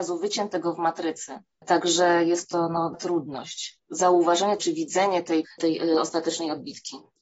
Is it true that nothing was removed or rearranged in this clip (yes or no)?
no